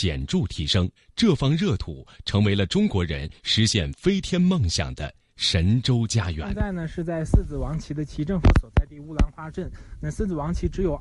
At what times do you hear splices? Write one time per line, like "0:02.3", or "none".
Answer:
0:01.0